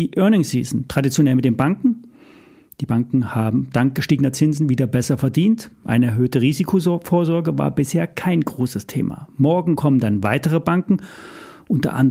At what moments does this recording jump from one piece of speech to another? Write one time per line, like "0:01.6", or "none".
none